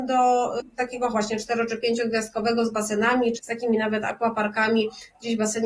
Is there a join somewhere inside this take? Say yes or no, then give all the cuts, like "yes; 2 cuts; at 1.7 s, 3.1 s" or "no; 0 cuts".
yes; 2 cuts; at 1.1 s, 3.4 s